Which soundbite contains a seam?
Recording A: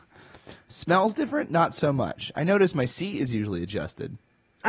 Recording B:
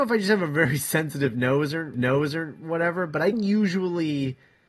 B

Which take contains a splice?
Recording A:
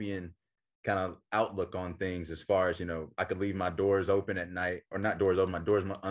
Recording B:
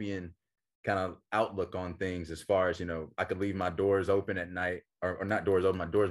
A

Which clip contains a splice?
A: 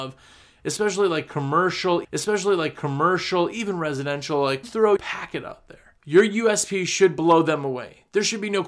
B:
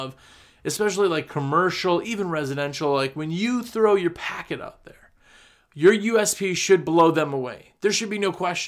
A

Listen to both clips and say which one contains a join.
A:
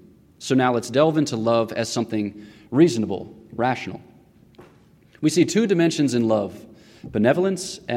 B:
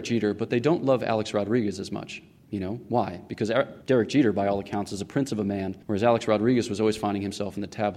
B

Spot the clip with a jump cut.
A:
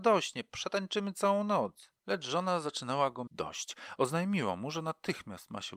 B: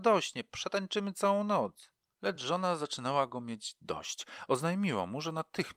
A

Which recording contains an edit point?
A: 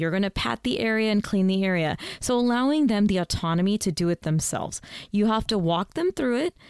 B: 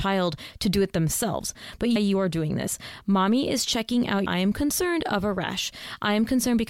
B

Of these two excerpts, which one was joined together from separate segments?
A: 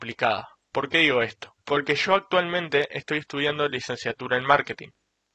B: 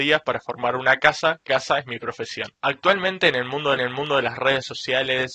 B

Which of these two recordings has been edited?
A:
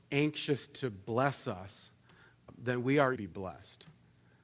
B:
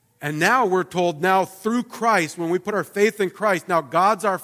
A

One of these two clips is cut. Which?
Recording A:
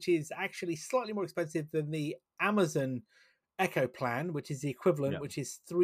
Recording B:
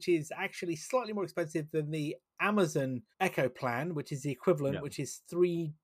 B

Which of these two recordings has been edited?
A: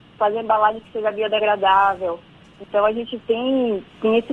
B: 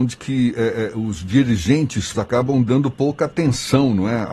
B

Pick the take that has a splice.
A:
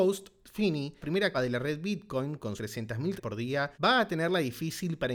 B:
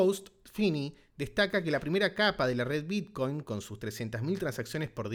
A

